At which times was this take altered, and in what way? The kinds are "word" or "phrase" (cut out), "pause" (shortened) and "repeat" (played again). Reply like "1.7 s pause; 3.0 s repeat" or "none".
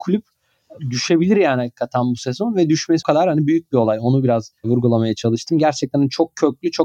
3.0 s word; 4.6 s pause